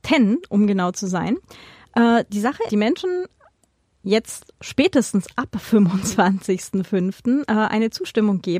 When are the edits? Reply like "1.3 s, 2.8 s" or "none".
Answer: 2.7 s